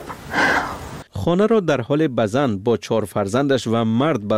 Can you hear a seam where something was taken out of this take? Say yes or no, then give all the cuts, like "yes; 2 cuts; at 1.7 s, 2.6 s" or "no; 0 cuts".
yes; 1 cut; at 1.1 s